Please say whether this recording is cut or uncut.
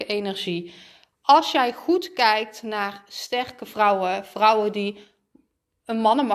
uncut